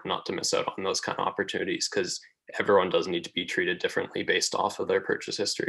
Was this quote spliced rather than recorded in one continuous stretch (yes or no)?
no